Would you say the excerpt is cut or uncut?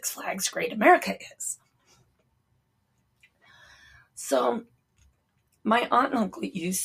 uncut